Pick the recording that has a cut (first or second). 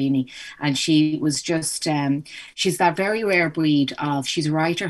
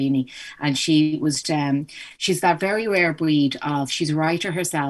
second